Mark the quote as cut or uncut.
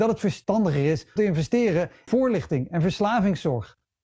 cut